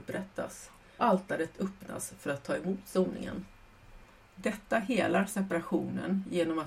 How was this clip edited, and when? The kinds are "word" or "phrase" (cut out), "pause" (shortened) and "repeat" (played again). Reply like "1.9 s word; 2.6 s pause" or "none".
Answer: 1.0 s word